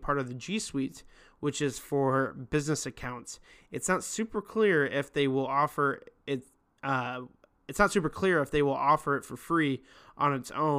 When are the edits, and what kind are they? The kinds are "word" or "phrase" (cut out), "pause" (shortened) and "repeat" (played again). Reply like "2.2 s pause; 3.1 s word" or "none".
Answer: none